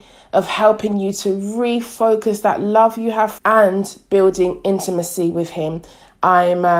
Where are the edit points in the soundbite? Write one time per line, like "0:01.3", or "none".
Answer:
0:03.4